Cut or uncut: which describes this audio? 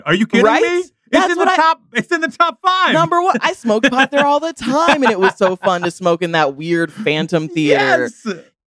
uncut